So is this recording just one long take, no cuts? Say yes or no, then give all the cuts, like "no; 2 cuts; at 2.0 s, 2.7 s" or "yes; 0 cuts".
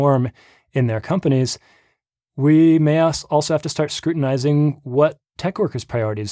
yes; 0 cuts